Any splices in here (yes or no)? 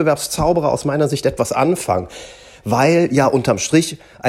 no